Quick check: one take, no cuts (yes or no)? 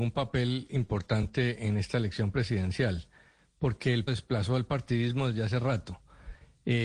no